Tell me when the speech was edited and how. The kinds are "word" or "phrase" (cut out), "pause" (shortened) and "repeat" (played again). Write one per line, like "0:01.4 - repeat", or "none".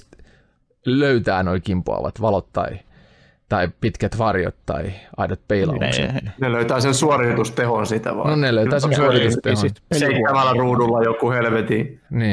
none